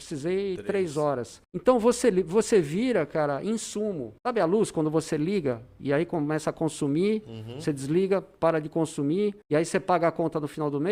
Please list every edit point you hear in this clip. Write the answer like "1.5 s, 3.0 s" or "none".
1.4 s, 4.2 s, 9.4 s

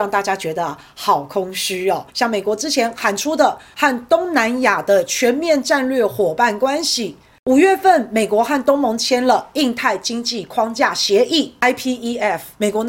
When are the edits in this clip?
2.1 s

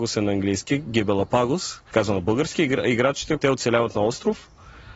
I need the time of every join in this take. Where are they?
1.9 s, 3.4 s

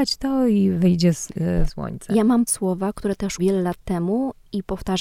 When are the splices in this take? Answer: 1.7 s, 2.5 s, 3.4 s

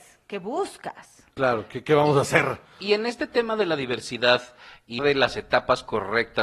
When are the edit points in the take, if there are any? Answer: 5.0 s

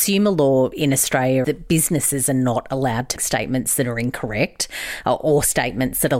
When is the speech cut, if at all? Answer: 1.4 s, 3.2 s

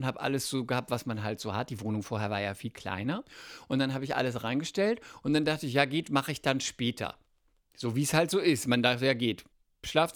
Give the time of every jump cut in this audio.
none

